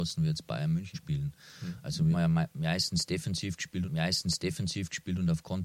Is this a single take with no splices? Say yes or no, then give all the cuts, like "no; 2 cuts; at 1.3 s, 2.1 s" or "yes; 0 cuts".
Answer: no; 3 cuts; at 0.9 s, 2.1 s, 3.8 s